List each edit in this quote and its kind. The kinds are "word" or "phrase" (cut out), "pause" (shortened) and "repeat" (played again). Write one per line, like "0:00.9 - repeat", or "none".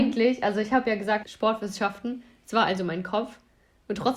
0:01.2 - phrase